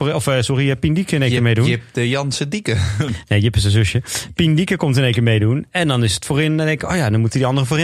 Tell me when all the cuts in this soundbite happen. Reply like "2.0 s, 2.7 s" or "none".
none